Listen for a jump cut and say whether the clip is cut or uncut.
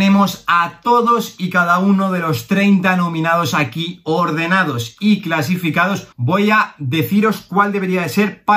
cut